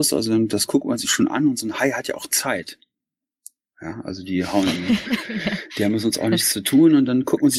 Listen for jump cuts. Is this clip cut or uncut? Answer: uncut